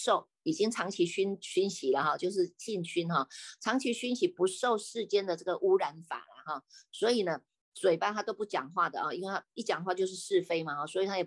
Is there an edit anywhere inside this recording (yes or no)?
no